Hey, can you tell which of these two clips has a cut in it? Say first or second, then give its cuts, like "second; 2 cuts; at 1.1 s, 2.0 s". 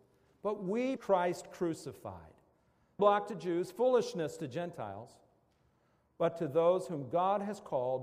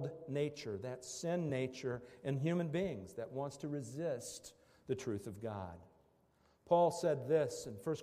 first; 2 cuts; at 1.0 s, 3.0 s